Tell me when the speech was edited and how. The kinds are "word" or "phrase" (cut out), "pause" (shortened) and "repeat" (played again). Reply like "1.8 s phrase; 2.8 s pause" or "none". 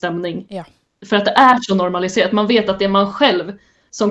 none